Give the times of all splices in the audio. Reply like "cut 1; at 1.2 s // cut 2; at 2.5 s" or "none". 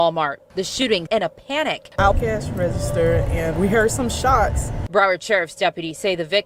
cut 1; at 1.1 s // cut 2; at 2.1 s // cut 3; at 3.5 s